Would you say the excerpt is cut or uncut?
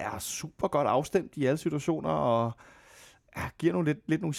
uncut